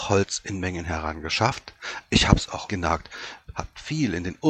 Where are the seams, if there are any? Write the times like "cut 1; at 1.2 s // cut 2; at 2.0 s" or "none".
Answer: cut 1; at 2.7 s